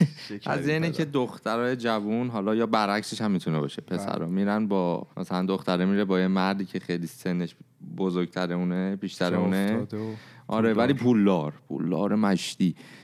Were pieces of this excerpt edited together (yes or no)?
yes